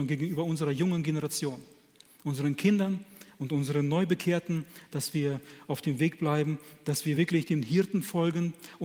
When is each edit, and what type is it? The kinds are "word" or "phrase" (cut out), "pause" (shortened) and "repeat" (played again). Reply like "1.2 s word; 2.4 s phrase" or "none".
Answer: none

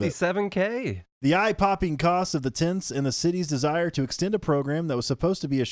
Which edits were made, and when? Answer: none

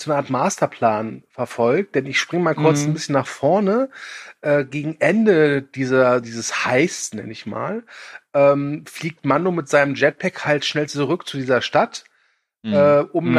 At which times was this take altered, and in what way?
none

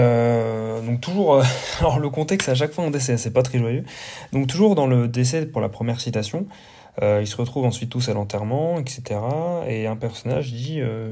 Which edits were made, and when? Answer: none

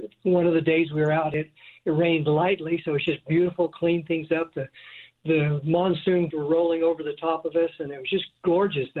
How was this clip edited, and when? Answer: 6.3 s word

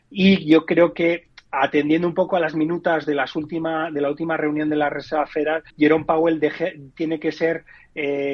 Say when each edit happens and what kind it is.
5.7 s pause

